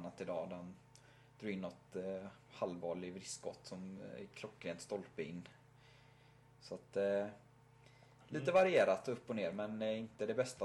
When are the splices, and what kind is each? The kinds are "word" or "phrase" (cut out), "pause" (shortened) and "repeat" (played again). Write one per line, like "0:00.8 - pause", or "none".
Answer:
none